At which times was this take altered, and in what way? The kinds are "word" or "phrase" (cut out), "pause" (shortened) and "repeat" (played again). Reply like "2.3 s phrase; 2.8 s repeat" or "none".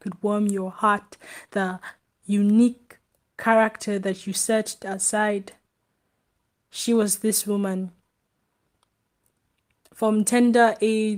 none